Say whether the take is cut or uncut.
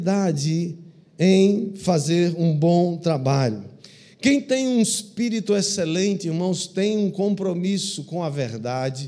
uncut